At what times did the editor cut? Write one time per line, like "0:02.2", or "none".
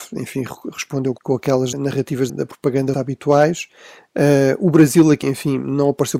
0:01.2
0:01.7
0:02.3
0:02.9
0:05.2